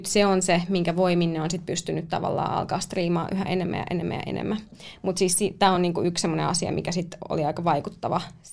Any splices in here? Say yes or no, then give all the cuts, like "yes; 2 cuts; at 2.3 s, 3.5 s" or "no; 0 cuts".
no; 0 cuts